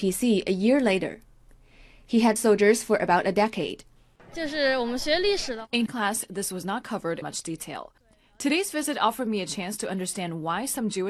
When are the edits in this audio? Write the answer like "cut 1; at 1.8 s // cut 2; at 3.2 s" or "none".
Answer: cut 1; at 2.4 s // cut 2; at 5.9 s // cut 3; at 7.2 s